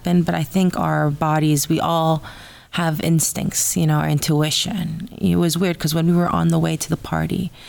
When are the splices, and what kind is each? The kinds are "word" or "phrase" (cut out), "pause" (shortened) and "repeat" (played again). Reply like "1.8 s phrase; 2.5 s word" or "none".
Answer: none